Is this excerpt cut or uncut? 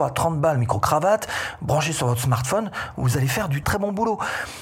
cut